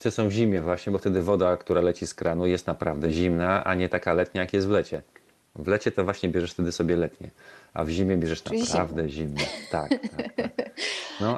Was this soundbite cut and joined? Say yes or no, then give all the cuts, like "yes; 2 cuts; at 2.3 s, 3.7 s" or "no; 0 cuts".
no; 0 cuts